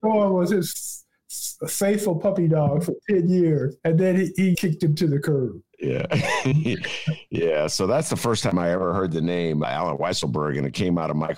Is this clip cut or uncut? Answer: cut